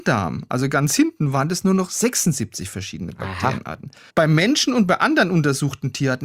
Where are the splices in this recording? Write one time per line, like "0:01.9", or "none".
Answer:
0:04.1